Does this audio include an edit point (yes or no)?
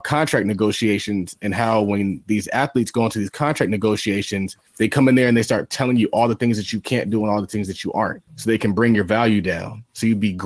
yes